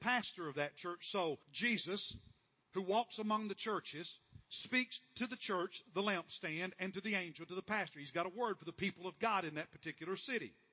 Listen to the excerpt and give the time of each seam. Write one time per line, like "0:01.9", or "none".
0:01.4
0:04.4